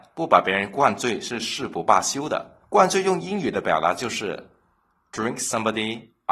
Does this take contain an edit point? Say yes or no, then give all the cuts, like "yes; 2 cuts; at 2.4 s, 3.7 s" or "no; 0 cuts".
yes; 1 cut; at 2.6 s